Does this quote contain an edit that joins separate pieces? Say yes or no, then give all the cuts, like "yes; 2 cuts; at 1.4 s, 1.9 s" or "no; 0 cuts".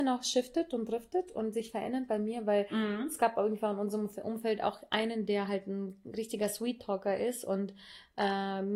no; 0 cuts